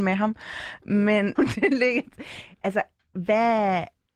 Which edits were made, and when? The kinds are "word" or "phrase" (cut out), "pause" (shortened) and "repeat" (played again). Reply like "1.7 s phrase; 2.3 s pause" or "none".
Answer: 1.4 s word